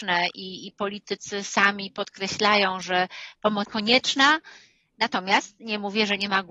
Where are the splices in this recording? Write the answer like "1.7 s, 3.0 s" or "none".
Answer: 3.6 s